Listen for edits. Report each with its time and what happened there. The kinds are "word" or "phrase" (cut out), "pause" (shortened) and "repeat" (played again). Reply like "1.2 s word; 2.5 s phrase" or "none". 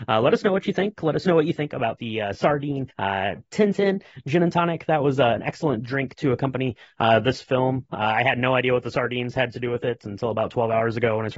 2.9 s pause